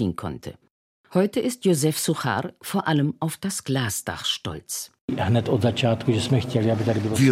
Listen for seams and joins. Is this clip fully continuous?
yes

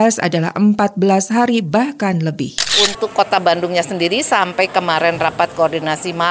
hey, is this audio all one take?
yes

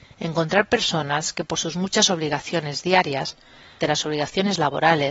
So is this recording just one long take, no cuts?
no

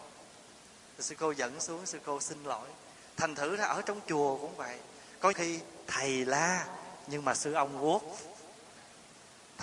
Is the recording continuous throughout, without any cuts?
no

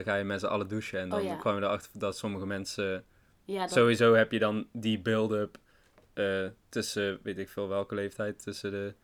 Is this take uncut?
yes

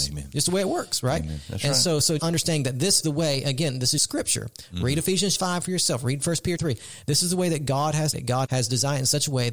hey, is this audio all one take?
no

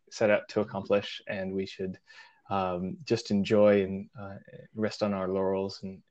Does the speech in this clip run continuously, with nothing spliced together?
yes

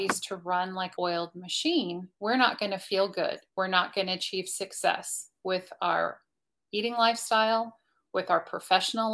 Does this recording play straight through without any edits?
no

